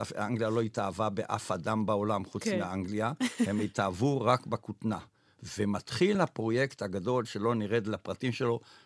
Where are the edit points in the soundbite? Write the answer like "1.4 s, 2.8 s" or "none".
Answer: none